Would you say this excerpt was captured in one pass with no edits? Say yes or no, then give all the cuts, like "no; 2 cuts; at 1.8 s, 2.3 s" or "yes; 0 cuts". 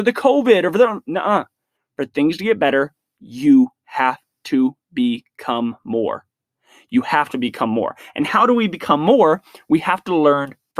yes; 0 cuts